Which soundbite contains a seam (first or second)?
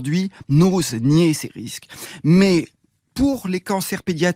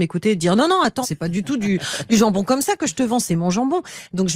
second